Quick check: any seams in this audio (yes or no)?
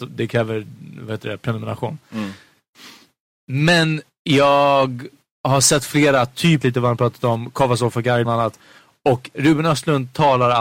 yes